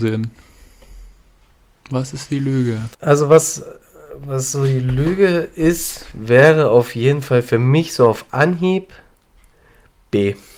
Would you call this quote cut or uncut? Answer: cut